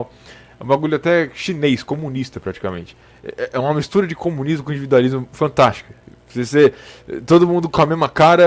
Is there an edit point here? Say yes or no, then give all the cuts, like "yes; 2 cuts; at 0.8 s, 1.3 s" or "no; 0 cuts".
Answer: no; 0 cuts